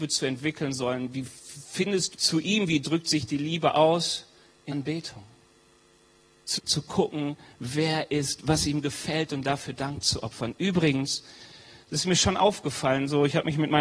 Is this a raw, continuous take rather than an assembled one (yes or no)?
no